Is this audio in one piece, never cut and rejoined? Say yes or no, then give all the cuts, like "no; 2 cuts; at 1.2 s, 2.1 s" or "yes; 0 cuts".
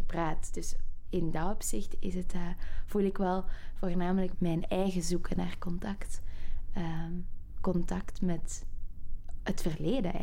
no; 1 cut; at 4.3 s